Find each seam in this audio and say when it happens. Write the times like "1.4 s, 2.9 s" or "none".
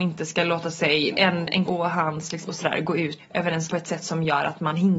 1.1 s, 1.7 s, 2.5 s, 3.2 s, 3.7 s